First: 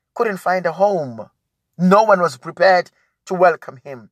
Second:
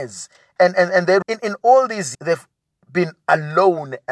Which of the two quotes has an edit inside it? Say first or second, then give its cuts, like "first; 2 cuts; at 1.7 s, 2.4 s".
second; 2 cuts; at 1.2 s, 2.1 s